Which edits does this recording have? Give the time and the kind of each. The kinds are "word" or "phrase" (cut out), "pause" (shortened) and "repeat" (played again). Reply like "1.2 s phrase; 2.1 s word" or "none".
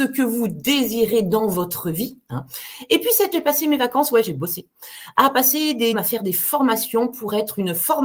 3.3 s word; 5.9 s word